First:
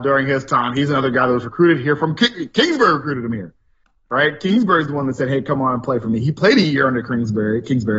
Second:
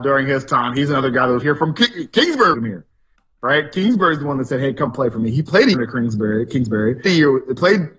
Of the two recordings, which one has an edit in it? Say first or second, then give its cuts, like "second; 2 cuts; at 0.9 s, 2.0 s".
second; 5 cuts; at 1.4 s, 2.5 s, 4.9 s, 5.7 s, 7.1 s